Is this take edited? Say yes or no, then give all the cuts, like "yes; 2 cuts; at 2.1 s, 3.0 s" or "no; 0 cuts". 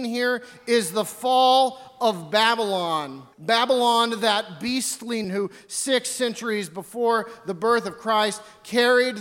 yes; 2 cuts; at 3.3 s, 5.2 s